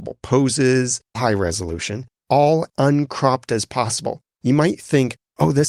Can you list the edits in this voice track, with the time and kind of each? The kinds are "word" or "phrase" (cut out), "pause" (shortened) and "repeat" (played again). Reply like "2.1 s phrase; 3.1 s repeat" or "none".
1.1 s word; 2.2 s word; 2.7 s word